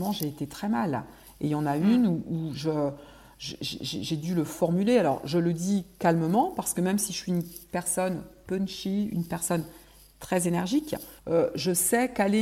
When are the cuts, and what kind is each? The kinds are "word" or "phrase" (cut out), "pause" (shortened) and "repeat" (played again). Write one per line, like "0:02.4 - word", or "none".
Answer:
0:11.2 - pause